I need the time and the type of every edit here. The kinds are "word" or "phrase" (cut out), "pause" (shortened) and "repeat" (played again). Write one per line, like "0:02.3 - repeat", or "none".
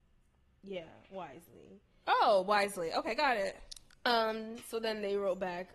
none